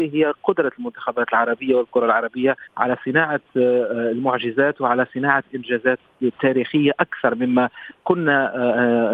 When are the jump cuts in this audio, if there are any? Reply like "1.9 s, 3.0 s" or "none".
2.7 s